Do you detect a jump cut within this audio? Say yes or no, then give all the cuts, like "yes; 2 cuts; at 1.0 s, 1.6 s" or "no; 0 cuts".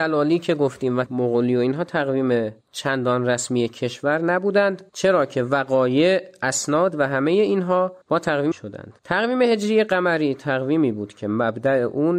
yes; 6 cuts; at 1.1 s, 2.6 s, 4.9 s, 8.0 s, 8.5 s, 9.0 s